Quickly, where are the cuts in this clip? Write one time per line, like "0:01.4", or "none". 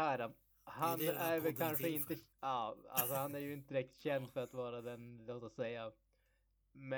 0:02.3

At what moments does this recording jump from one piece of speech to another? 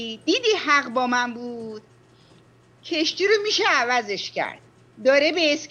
none

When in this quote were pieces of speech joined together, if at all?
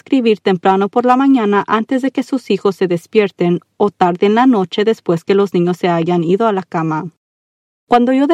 none

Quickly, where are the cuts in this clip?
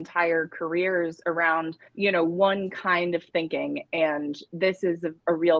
0:01.9

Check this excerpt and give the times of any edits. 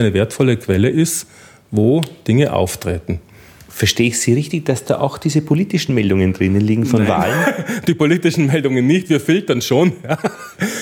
none

